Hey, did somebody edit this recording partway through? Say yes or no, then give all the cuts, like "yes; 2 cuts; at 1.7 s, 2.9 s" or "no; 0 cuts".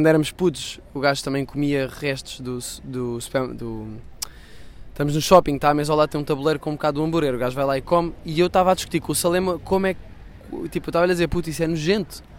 no; 0 cuts